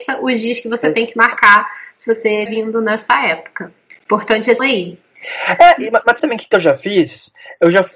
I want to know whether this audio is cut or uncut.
cut